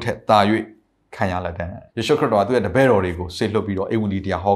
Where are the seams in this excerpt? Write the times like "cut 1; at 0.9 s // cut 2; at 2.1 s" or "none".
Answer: cut 1; at 1.9 s